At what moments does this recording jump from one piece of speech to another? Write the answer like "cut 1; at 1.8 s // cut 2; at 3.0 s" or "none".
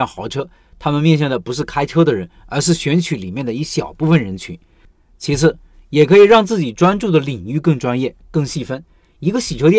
none